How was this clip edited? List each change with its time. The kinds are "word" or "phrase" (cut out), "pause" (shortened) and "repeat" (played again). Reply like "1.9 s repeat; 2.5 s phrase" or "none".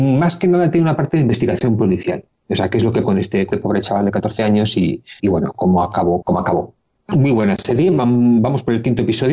3.0 s word; 3.5 s word; 5.2 s word; 6.2 s word